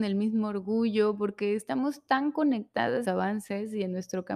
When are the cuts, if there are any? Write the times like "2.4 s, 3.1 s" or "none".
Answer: 3.0 s